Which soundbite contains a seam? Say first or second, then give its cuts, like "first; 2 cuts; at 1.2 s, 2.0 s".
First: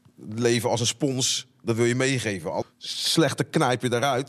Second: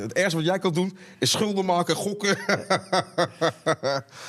first; 1 cut; at 2.6 s